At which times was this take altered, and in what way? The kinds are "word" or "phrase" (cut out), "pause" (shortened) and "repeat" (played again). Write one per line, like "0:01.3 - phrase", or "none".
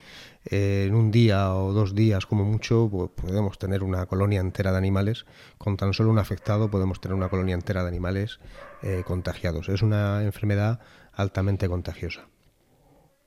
none